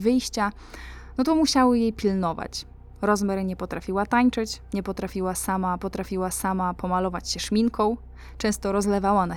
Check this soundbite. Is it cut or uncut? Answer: cut